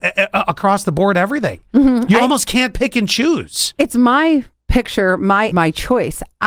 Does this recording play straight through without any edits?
no; 1 cut; at 5.5 s

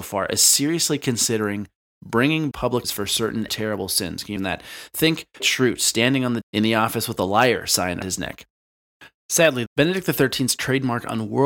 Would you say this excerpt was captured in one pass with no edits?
no; 8 cuts; at 2.5 s, 2.8 s, 3.5 s, 4.4 s, 5.4 s, 6.4 s, 8.0 s, 9.7 s

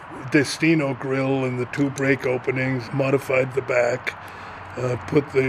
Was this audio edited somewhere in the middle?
yes; 1 cut; at 2.9 s

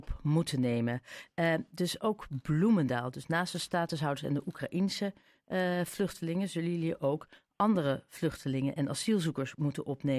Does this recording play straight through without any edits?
yes; 0 cuts

